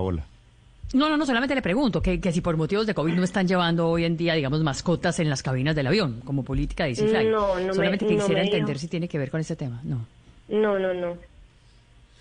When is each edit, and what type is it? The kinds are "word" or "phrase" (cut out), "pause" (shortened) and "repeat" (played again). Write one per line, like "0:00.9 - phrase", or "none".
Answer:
none

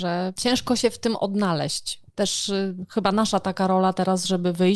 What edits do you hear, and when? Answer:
0:02.1 - word

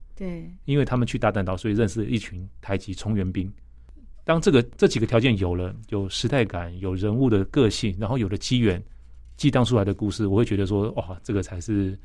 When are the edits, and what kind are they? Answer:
none

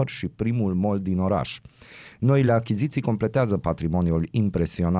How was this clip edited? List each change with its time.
none

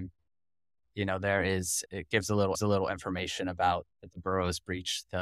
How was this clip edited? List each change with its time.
0:01.9 - word
0:02.5 - repeat
0:03.9 - pause

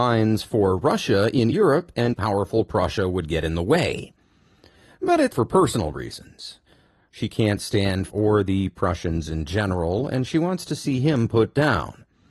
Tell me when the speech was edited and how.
0:01.5 - word
0:02.1 - word
0:05.3 - word
0:08.1 - word

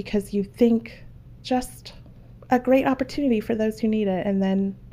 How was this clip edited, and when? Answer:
0:01.4 - word

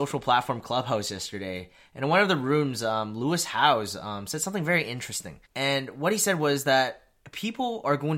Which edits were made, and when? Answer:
0:05.5 - pause

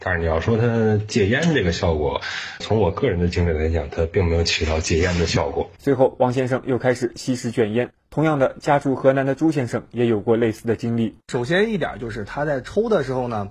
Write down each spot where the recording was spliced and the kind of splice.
0:02.6 - word
0:05.8 - pause

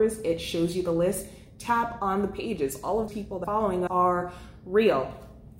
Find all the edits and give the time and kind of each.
0:03.1 - word
0:03.4 - word
0:03.9 - word

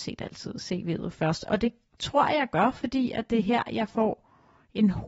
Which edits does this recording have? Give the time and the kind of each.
none

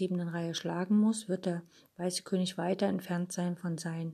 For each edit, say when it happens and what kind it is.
none

